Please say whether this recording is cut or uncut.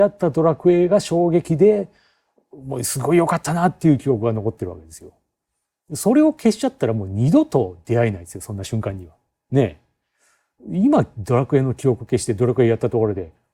uncut